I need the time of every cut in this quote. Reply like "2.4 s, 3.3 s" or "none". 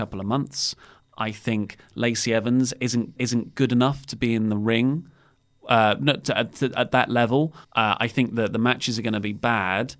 3.2 s, 7.6 s